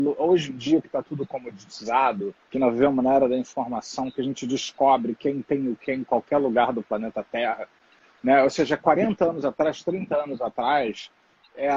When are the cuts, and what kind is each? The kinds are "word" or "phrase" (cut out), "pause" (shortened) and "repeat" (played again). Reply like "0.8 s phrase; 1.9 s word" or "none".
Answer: 2.4 s pause